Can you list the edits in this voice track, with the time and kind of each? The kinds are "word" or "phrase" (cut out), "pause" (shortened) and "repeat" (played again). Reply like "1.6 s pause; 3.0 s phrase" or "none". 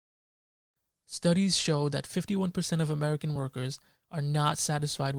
none